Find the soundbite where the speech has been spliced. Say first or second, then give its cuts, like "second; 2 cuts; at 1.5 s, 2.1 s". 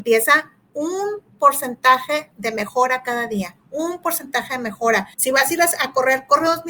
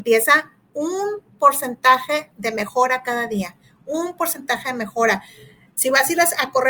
first; 2 cuts; at 3.6 s, 5.1 s